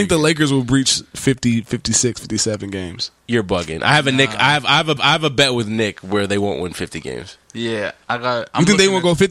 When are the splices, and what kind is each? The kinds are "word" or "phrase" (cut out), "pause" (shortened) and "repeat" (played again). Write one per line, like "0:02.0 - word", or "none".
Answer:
0:05.0 - repeat